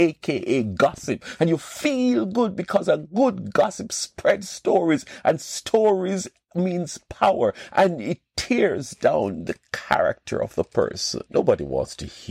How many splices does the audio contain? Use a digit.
1